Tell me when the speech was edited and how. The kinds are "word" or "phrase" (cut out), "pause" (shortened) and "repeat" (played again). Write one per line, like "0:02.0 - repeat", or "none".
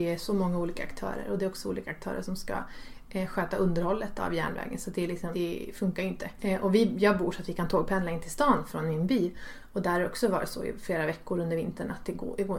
0:05.3 - word